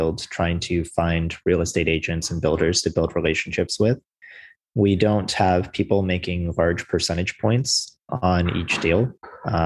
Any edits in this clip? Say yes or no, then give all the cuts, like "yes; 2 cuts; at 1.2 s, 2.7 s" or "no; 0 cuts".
no; 0 cuts